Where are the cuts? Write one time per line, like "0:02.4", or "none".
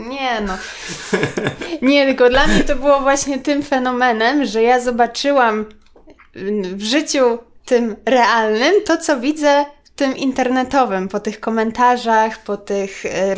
none